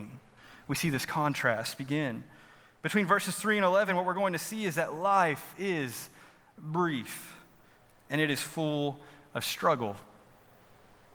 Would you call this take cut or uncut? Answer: uncut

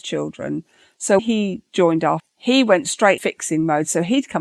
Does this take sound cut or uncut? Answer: cut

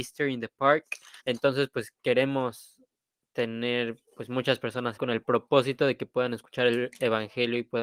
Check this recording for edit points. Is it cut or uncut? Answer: cut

